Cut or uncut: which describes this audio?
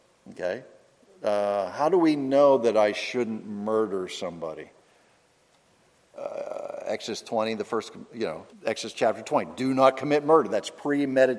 cut